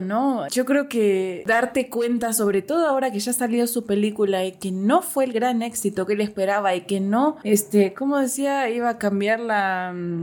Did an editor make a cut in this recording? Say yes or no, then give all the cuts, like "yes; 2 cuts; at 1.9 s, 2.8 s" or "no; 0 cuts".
no; 0 cuts